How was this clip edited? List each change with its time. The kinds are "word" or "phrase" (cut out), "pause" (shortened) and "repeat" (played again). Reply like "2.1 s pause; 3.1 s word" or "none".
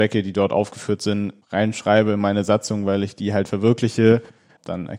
none